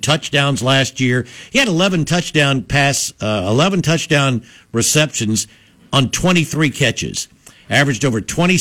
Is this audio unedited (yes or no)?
yes